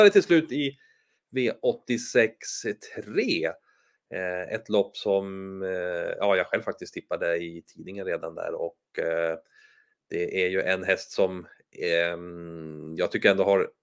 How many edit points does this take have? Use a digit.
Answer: 0